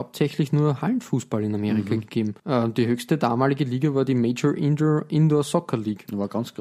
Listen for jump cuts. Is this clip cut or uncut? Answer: cut